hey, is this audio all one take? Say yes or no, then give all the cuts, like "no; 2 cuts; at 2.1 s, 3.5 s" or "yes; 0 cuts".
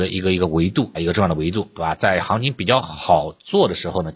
no; 1 cut; at 0.9 s